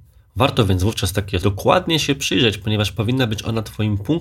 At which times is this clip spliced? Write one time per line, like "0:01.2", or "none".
0:01.4